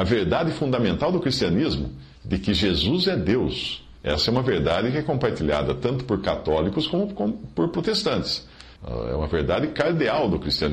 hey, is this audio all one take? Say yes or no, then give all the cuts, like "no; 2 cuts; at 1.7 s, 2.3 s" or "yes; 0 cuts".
no; 3 cuts; at 2.2 s, 4.0 s, 8.8 s